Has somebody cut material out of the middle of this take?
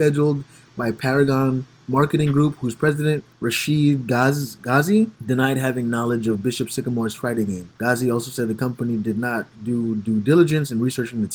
yes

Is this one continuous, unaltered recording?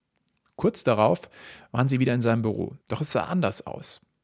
no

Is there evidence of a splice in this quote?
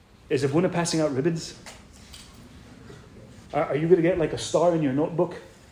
yes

